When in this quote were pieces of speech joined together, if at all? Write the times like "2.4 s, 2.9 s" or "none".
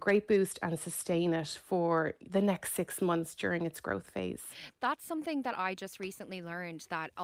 none